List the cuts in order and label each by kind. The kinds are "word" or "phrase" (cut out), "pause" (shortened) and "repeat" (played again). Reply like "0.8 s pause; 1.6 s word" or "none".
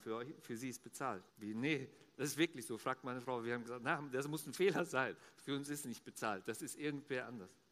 1.3 s pause